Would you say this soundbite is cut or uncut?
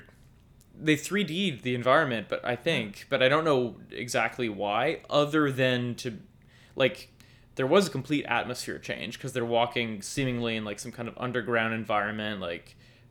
uncut